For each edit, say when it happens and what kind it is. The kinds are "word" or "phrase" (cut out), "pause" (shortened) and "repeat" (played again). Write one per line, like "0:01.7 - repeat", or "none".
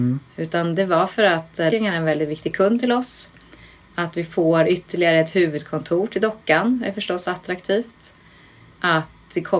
0:01.7 - word